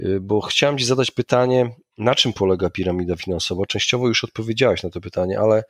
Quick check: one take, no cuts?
yes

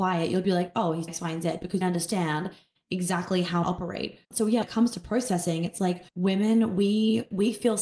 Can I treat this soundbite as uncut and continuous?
no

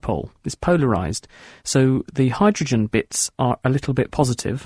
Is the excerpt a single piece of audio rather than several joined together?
yes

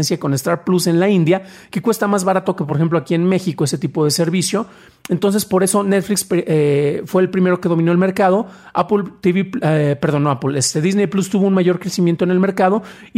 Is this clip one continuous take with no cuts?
yes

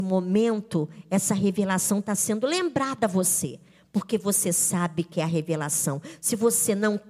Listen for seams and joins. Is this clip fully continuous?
yes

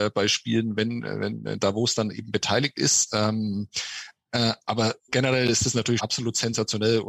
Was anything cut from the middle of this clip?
yes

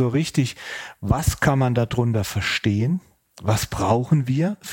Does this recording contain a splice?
no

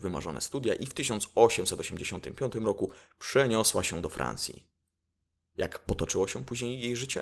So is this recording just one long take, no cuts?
yes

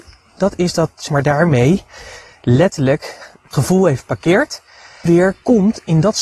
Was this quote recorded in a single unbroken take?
no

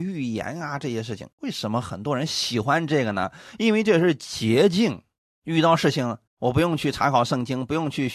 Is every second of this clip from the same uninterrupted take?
no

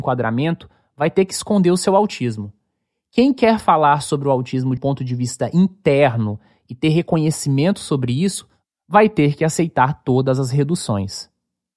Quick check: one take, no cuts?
no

